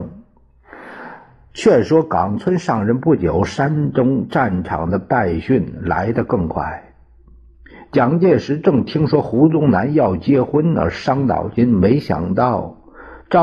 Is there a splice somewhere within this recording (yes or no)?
no